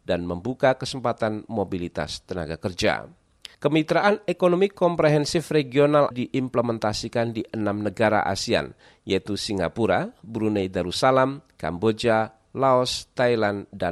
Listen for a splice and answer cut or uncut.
cut